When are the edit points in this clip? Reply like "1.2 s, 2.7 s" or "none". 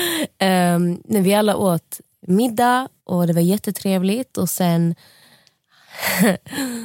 3.0 s